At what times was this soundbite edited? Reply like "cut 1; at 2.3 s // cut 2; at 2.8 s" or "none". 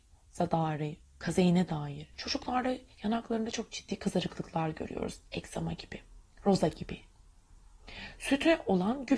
cut 1; at 1.0 s // cut 2; at 2.1 s // cut 3; at 6.2 s